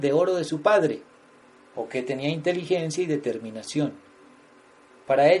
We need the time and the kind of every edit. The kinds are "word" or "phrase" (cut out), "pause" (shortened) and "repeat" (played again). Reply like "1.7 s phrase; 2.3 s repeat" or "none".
none